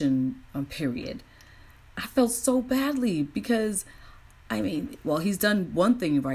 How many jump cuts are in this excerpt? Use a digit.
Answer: 0